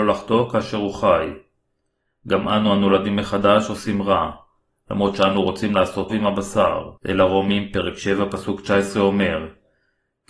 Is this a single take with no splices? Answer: no; 2 cuts; at 6.1 s, 7.0 s

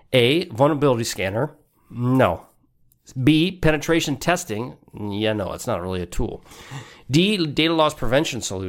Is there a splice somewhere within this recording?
no; 0 cuts

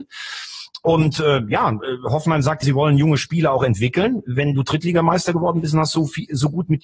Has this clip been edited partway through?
yes; 1 cut; at 2.6 s

